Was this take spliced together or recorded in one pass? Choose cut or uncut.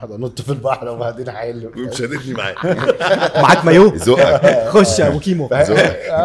uncut